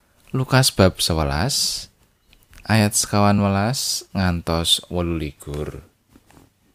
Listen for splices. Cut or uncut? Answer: uncut